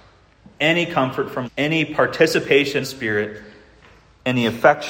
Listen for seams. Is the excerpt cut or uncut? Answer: cut